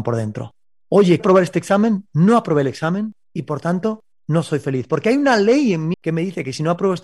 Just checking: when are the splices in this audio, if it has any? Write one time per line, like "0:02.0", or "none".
0:01.2
0:05.9